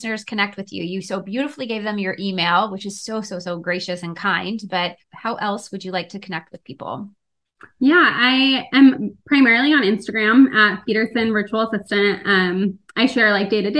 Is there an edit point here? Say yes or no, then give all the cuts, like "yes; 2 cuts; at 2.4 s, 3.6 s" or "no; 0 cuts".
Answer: yes; 2 cuts; at 5.0 s, 12.9 s